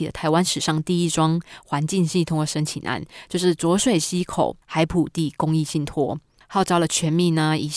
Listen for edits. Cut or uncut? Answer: uncut